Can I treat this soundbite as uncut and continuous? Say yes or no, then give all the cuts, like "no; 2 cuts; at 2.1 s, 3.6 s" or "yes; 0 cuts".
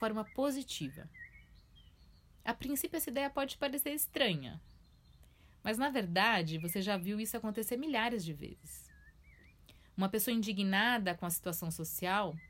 yes; 0 cuts